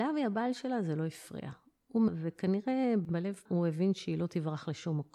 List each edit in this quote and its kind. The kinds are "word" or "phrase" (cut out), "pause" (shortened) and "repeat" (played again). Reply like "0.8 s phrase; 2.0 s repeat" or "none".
2.1 s phrase; 3.5 s word

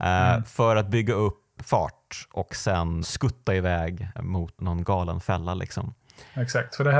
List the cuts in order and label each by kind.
1.6 s word; 3.0 s word; 4.2 s word; 4.6 s word

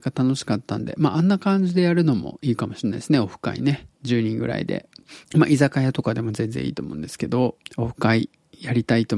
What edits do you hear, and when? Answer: 3.9 s pause; 5.2 s pause; 7.7 s pause

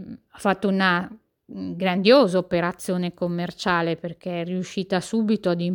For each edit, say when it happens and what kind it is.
none

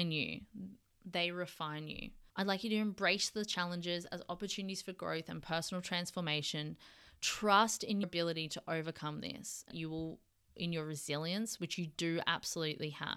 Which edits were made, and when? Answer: 2.3 s pause; 8.0 s word; 9.7 s phrase

